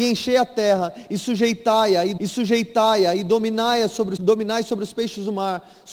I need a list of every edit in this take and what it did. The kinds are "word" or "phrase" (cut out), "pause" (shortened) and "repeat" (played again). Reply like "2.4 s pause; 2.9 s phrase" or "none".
2.2 s repeat; 4.2 s word